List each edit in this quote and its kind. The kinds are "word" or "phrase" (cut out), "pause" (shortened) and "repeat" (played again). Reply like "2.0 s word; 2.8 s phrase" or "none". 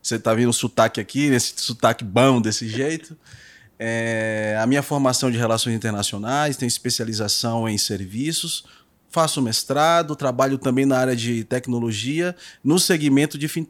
none